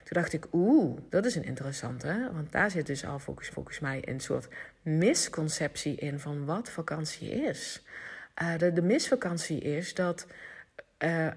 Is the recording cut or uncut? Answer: cut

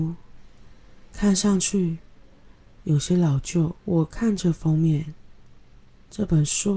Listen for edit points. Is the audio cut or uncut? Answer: cut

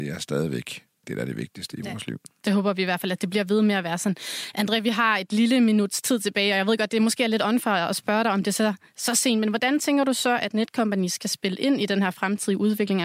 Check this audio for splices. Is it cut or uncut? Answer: uncut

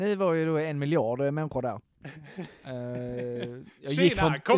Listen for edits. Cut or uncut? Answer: uncut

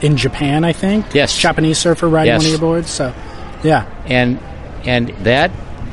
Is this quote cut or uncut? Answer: uncut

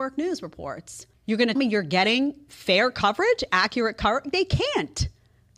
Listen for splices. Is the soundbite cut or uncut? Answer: cut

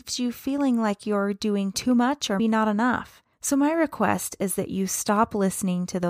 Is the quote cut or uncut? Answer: cut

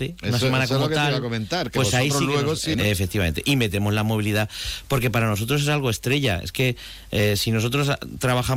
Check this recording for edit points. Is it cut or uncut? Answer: cut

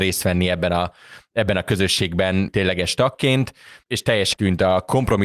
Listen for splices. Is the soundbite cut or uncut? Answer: cut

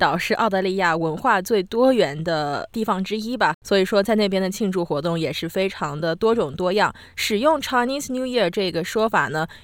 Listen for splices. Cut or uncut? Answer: cut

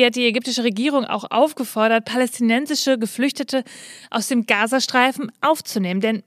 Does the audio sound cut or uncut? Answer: uncut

